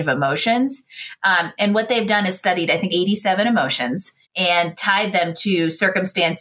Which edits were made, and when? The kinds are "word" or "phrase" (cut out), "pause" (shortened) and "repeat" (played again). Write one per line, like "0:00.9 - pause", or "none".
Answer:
0:02.9 - word
0:04.2 - pause